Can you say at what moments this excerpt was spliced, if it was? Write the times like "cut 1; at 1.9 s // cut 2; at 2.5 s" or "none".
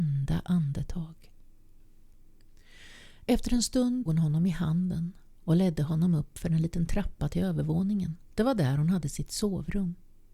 cut 1; at 4.1 s // cut 2; at 8.2 s